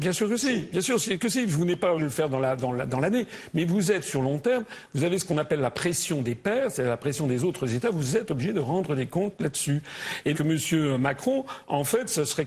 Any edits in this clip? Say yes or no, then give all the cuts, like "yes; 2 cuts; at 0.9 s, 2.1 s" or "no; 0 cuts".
yes; 2 cuts; at 2.0 s, 10.3 s